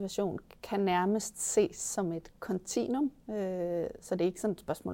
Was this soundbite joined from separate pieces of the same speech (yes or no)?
yes